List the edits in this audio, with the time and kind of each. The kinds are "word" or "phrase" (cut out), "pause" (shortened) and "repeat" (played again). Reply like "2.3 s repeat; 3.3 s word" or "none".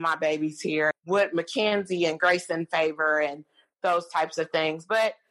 0.9 s word